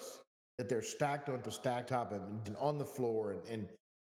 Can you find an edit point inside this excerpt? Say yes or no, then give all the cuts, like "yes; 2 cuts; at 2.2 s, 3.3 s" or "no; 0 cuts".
yes; 3 cuts; at 1.4 s, 1.9 s, 2.4 s